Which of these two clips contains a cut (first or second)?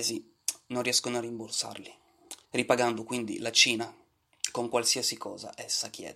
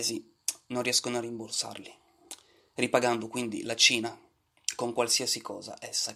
first